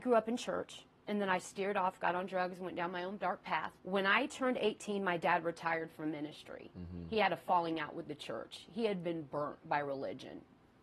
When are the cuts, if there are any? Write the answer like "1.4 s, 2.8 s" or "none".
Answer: 3.8 s

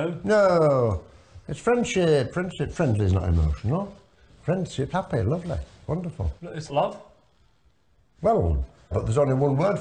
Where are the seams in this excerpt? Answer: 4.9 s, 6.4 s, 6.7 s, 8.9 s

